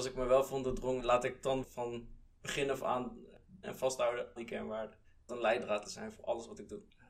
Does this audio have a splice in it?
yes; 6 cuts; at 1.0 s, 1.6 s, 3.6 s, 4.4 s, 5.3 s, 5.8 s

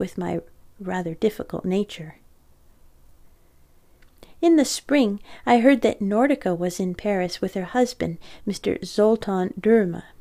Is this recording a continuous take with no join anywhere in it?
yes; 0 cuts

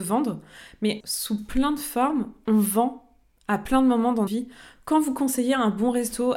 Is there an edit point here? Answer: yes; 2 cuts; at 1.0 s, 4.3 s

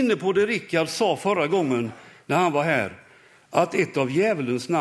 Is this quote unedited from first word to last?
yes; 0 cuts

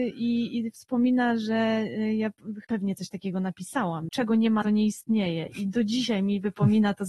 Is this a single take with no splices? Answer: no; 3 cuts; at 2.6 s, 4.1 s, 4.6 s

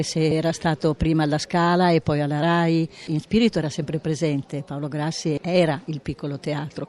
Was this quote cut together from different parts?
no; 0 cuts

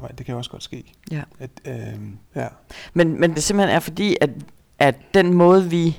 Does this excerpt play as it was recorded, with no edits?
no; 2 cuts; at 2.2 s, 3.4 s

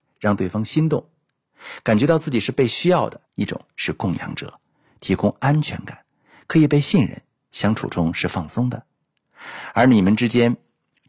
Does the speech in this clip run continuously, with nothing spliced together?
no; 1 cut; at 3.3 s

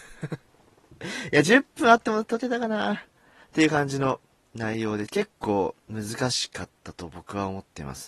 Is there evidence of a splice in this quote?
no; 0 cuts

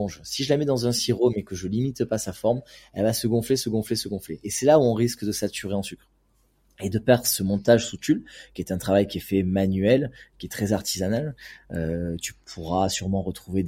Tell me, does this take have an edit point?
no; 0 cuts

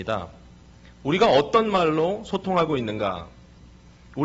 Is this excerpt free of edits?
yes; 0 cuts

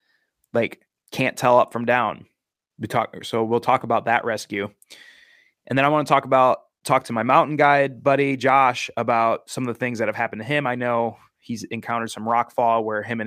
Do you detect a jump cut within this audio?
no; 0 cuts

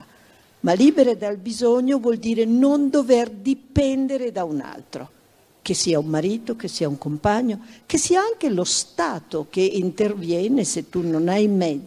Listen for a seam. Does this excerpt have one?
no; 0 cuts

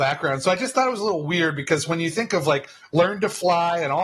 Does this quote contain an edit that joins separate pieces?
no; 0 cuts

